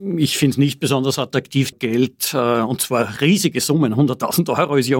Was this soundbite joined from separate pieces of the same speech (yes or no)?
yes